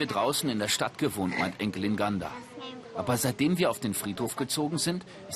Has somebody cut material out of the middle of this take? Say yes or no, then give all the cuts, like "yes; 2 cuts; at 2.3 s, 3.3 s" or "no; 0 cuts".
no; 0 cuts